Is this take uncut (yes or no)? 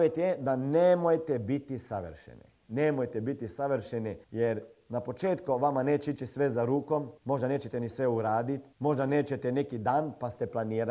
no